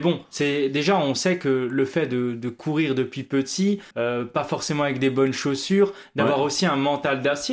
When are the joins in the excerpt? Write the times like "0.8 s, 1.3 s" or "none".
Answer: 3.9 s